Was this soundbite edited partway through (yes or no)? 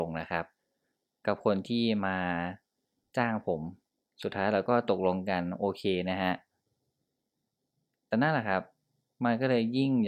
yes